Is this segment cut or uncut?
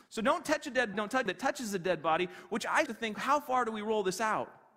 cut